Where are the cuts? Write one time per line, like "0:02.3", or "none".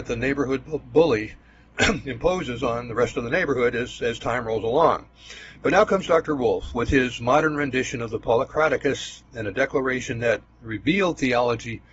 none

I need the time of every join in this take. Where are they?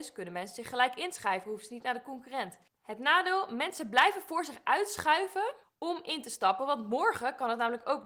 none

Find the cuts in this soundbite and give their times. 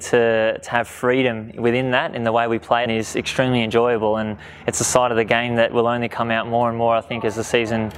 0:02.9

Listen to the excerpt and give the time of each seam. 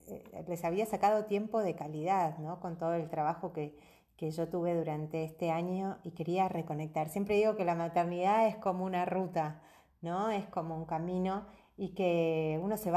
none

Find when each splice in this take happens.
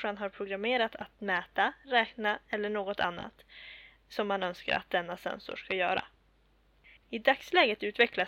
none

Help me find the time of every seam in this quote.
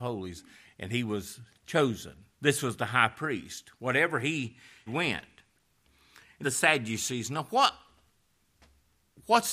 0:02.3
0:04.9
0:06.4

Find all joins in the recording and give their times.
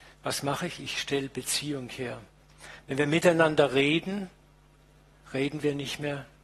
none

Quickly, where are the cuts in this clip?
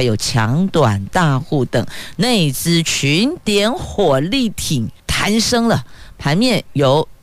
0:05.0

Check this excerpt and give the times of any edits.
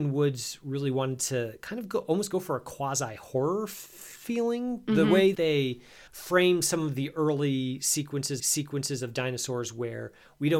0:05.3
0:06.1
0:08.4

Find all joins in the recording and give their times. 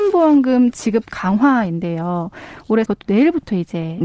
0:01.1
0:02.9

